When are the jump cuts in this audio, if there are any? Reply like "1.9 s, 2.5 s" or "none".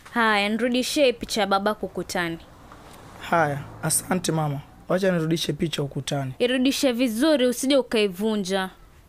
1.8 s, 6.4 s